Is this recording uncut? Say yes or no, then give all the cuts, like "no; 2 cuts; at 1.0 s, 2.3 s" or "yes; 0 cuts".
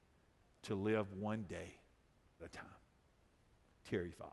no; 1 cut; at 2.4 s